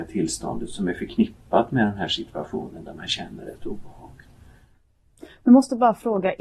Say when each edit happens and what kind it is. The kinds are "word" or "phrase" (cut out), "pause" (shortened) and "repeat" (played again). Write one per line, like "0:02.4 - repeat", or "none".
none